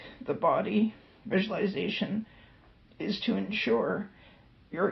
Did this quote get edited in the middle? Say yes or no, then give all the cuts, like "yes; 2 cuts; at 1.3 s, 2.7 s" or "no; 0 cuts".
no; 0 cuts